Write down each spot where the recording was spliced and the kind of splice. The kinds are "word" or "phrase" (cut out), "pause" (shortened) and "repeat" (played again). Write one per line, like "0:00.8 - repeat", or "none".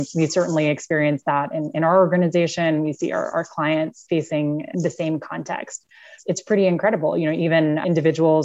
none